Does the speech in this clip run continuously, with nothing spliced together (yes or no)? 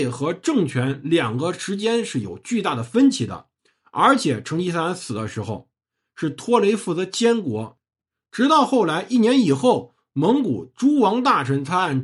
yes